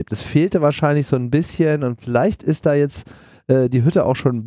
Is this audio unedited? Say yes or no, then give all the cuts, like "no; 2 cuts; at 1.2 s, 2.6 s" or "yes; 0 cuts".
yes; 0 cuts